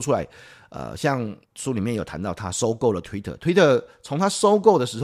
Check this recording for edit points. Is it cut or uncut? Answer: cut